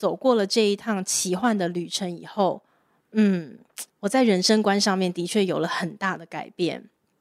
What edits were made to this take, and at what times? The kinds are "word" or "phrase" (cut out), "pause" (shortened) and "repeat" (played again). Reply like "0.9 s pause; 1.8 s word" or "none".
3.9 s pause